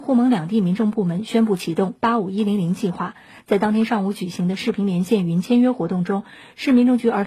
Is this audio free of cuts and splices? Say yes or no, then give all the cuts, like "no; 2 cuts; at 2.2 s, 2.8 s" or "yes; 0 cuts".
yes; 0 cuts